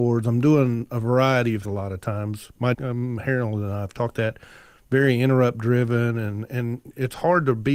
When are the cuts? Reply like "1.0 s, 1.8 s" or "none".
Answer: 1.6 s, 2.7 s, 4.1 s